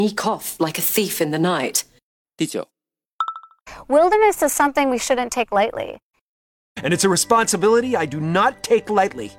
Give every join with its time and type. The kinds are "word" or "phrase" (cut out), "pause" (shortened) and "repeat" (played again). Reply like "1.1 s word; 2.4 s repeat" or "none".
none